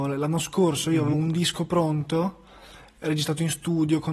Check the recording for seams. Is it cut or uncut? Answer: uncut